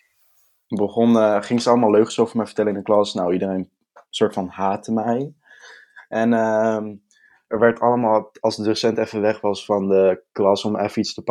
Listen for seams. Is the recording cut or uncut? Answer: uncut